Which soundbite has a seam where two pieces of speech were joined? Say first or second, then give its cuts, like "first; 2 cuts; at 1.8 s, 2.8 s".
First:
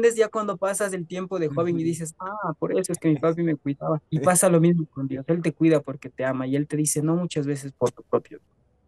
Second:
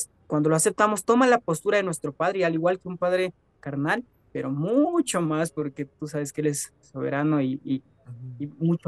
first; 1 cut; at 4.1 s